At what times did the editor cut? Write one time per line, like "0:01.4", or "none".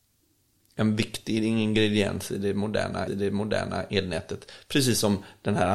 0:03.1

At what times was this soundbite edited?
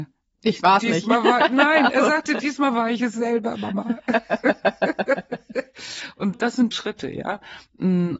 0:06.3
0:06.7

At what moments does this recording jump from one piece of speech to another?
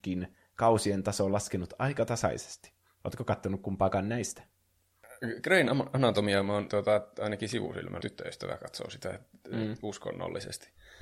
0:06.7
0:08.0

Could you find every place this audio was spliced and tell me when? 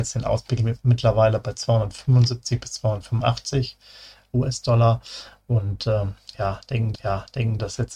0:06.9

